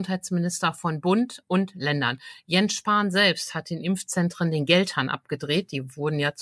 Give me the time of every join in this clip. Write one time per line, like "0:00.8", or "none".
none